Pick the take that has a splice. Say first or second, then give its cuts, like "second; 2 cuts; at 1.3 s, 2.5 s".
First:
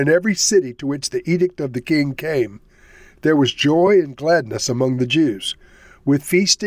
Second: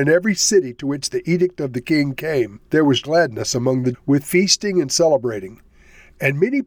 second; 3 cuts; at 2.7 s, 3.0 s, 3.9 s